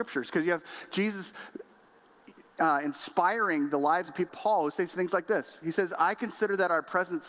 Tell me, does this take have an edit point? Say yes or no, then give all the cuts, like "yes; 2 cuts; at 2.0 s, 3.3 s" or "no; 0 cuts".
yes; 1 cut; at 4.3 s